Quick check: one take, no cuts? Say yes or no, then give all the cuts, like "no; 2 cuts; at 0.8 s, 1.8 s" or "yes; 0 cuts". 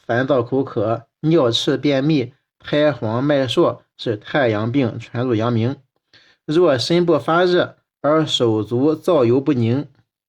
yes; 0 cuts